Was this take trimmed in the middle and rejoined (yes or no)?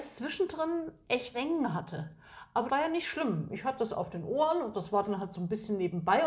yes